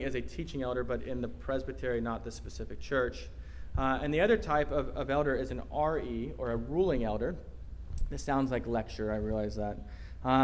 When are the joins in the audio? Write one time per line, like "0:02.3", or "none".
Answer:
none